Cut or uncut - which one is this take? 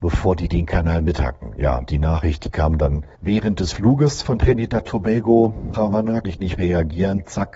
cut